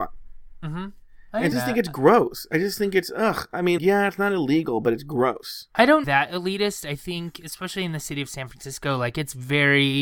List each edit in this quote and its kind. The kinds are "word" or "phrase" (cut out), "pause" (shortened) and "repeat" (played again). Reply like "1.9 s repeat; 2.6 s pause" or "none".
1.5 s phrase; 3.8 s word; 6.0 s phrase